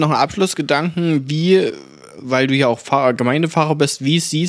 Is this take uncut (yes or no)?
yes